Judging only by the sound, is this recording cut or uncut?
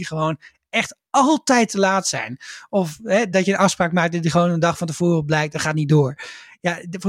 cut